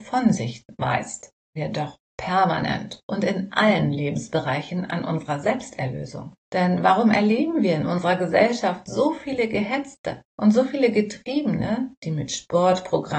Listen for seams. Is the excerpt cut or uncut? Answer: cut